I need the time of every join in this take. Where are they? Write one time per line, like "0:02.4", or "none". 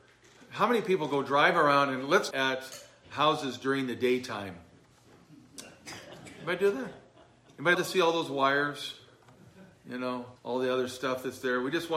0:02.3
0:07.7
0:10.4